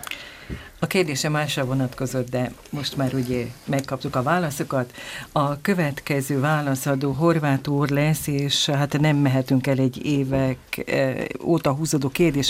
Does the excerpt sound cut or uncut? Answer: uncut